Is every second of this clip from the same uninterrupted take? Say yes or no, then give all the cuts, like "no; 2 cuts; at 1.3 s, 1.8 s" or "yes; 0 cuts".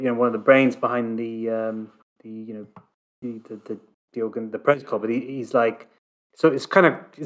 yes; 0 cuts